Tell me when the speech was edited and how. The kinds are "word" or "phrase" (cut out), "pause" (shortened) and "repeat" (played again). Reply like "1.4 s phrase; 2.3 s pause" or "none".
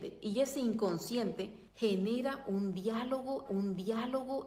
1.7 s pause; 3.5 s repeat